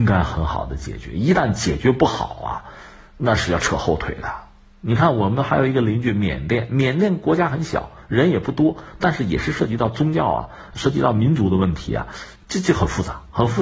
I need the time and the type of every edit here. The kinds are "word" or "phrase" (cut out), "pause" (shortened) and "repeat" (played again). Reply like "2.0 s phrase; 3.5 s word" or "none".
none